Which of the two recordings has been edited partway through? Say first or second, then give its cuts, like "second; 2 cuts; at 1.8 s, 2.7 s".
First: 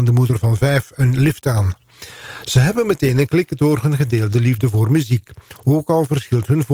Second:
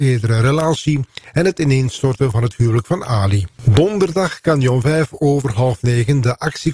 second; 1 cut; at 3.5 s